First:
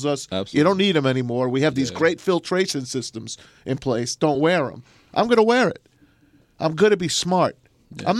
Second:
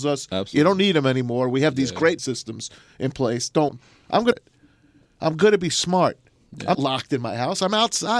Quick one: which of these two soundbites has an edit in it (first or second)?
second